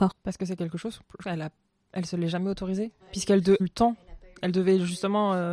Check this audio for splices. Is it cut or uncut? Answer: cut